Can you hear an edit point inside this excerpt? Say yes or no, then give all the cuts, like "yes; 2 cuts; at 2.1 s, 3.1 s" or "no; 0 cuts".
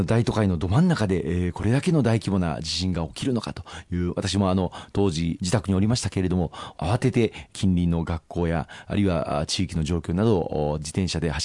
no; 0 cuts